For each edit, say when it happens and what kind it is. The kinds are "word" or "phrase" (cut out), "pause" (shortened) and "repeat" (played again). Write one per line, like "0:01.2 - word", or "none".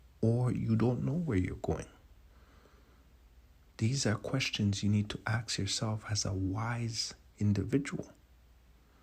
none